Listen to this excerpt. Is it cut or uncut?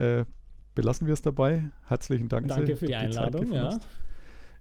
cut